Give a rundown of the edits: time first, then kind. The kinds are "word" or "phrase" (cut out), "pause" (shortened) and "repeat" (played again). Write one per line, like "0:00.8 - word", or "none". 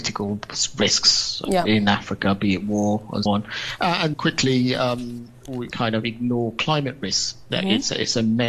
0:03.3 - word
0:04.1 - word
0:05.7 - phrase